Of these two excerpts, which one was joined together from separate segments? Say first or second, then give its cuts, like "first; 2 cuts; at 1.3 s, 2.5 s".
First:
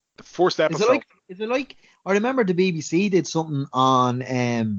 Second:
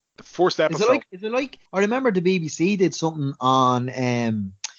second; 2 cuts; at 1.1 s, 1.7 s